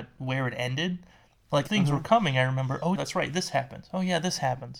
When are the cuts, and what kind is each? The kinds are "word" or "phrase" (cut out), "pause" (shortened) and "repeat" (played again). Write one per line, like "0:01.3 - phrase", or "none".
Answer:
0:01.7 - word
0:03.0 - word